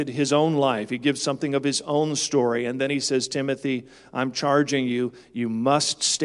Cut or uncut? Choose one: uncut